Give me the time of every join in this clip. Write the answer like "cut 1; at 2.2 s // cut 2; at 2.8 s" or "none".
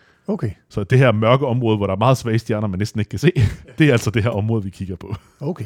none